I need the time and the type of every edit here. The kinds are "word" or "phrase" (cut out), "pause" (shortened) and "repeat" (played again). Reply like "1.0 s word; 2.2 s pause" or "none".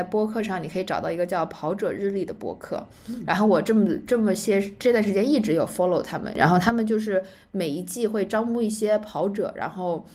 none

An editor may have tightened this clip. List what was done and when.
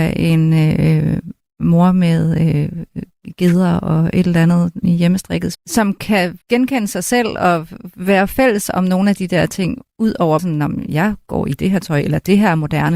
4.8 s phrase; 5.5 s word; 6.4 s pause; 10.4 s word

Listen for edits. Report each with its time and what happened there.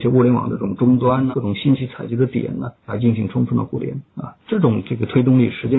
1.3 s word; 2.8 s pause; 4.1 s pause

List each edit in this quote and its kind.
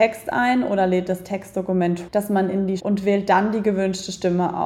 2.1 s word; 2.8 s phrase

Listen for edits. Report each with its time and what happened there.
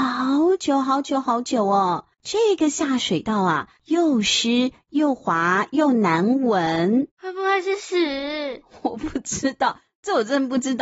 2.1 s pause; 3.8 s pause; 7.1 s pause

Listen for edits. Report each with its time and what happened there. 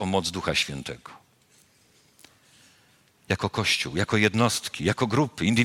none

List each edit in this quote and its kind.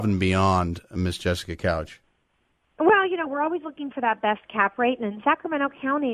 none

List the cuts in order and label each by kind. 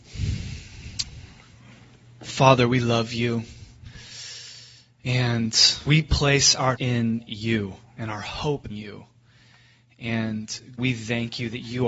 5.9 s word; 6.8 s word; 8.7 s word; 10.8 s word

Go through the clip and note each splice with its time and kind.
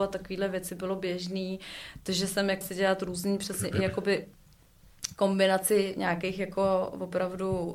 2.6 s word

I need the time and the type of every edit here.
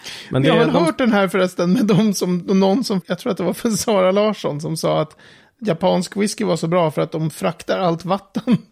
3.0 s phrase

